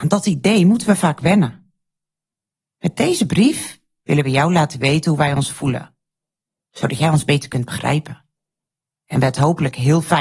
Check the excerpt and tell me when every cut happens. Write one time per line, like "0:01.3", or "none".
none

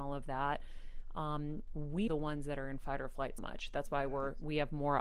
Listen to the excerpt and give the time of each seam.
0:02.1
0:03.4

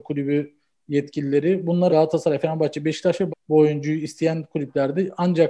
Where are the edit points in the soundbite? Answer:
0:01.9
0:03.3

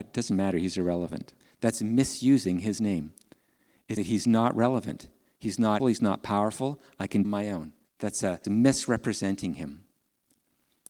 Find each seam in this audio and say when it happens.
0:01.4
0:04.0
0:05.8
0:07.2
0:07.8
0:08.4

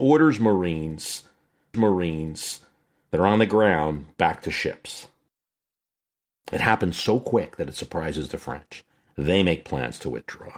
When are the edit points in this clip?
0:01.7

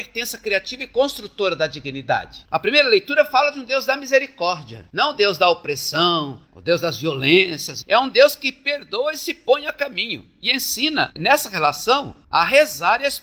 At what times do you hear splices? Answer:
none

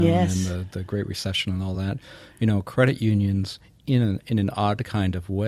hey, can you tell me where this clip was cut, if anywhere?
none

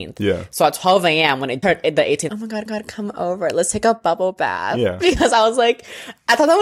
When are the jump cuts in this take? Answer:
0:01.6
0:02.3
0:02.7

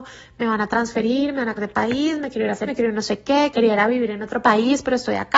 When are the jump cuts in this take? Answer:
0:01.6
0:02.7
0:03.5

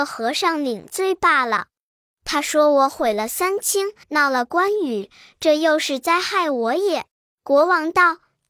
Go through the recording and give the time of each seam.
0:04.0
0:07.1

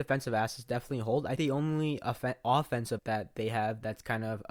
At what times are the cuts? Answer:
0:01.4
0:03.0

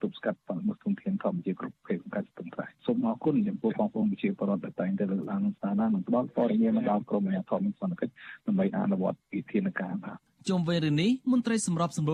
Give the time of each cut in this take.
0:10.3
0:11.2

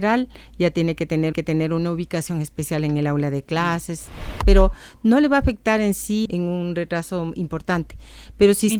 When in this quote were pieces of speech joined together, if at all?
0:01.3
0:06.3

